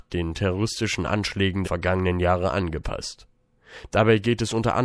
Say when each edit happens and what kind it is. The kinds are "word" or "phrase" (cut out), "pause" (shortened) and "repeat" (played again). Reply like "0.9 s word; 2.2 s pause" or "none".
1.6 s word